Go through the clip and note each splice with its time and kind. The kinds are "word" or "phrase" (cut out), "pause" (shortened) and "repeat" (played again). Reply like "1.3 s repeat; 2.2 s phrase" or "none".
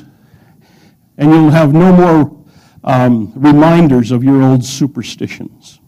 none